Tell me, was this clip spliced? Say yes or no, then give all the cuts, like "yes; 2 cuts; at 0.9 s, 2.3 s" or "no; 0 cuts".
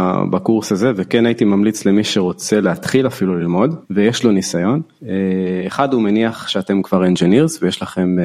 yes; 2 cuts; at 3.8 s, 5.0 s